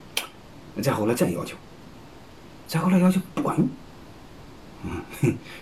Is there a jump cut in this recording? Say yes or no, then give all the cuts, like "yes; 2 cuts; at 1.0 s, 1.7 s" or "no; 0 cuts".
no; 0 cuts